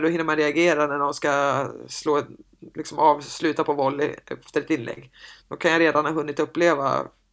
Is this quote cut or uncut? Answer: uncut